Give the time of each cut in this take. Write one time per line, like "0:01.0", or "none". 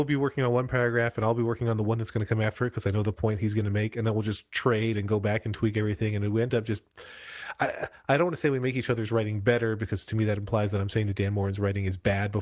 none